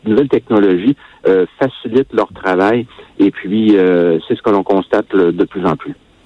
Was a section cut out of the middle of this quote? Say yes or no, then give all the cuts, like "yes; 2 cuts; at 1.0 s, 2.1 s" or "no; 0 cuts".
no; 0 cuts